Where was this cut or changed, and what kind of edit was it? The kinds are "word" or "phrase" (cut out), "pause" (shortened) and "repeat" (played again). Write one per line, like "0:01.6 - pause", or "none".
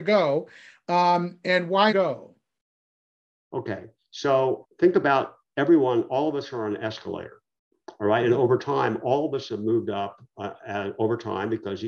0:01.9 - phrase
0:04.6 - word